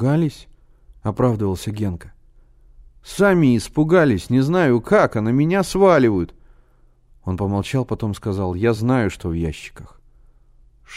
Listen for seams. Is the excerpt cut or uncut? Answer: uncut